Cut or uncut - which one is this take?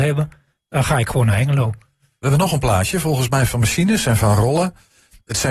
uncut